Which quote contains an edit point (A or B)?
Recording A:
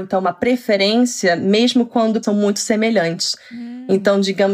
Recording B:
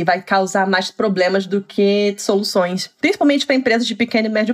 A